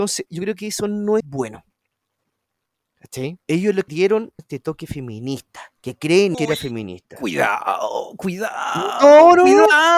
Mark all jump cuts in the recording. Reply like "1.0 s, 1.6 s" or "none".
1.2 s, 3.4 s, 3.9 s, 4.4 s, 5.7 s, 6.3 s